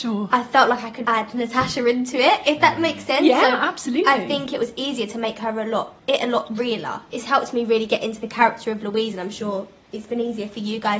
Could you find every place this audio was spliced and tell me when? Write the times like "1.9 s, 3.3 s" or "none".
1.0 s, 6.0 s